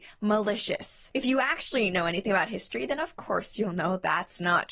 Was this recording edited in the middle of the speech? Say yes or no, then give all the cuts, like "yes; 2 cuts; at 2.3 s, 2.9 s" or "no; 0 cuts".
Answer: no; 0 cuts